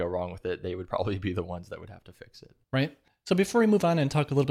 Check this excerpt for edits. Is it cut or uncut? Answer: cut